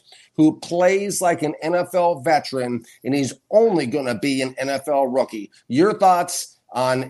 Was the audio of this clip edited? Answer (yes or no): no